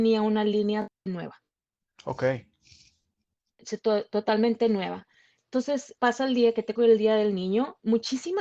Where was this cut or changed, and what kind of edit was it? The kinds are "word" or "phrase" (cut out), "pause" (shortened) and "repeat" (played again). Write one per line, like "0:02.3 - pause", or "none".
0:01.1 - word
0:06.0 - word
0:06.8 - word